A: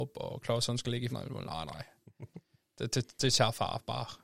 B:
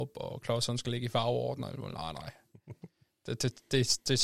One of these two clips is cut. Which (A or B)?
A